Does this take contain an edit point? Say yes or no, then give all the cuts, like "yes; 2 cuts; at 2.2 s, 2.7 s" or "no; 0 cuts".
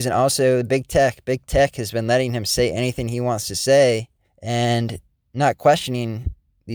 yes; 1 cut; at 4.2 s